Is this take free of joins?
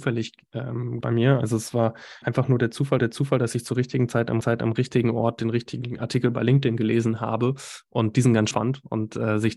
no; 5 cuts; at 1.0 s, 2.2 s, 3.0 s, 4.4 s, 8.5 s

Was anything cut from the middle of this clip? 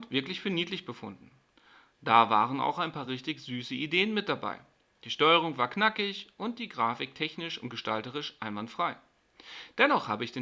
no; 0 cuts

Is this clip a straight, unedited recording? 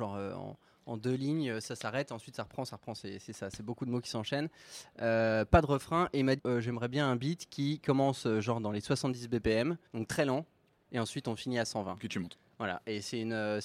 no; 2 cuts; at 6.4 s, 9.9 s

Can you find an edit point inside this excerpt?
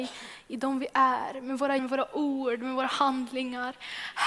yes; 1 cut; at 1.8 s

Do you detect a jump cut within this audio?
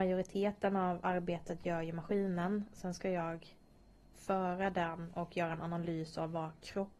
no; 0 cuts

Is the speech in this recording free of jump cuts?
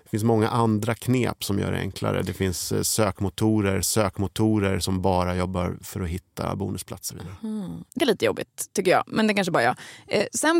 no; 3 cuts; at 3.8 s, 7.1 s, 8.0 s

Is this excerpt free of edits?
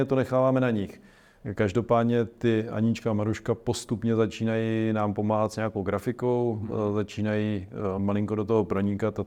yes; 0 cuts

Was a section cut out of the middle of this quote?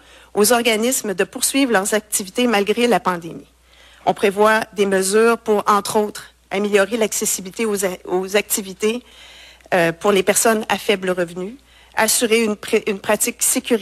no; 0 cuts

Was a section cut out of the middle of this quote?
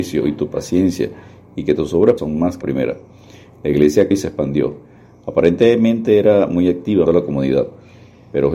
yes; 4 cuts; at 2.2 s, 2.6 s, 4.1 s, 7.1 s

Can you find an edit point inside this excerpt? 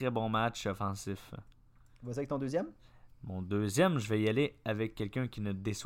no; 0 cuts

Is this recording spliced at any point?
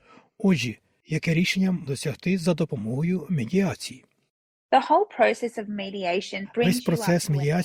yes; 1 cut; at 1.9 s

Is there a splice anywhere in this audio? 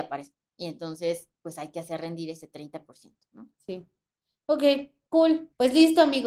yes; 2 cuts; at 1.3 s, 3.6 s

